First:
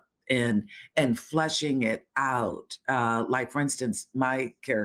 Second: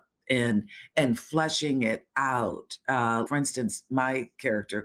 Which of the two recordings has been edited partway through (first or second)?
second